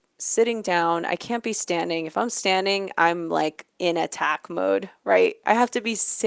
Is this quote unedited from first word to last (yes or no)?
yes